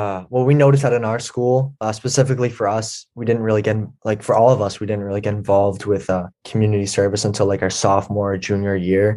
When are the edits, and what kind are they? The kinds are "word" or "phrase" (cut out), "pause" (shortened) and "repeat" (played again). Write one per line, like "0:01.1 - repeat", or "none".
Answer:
0:06.3 - pause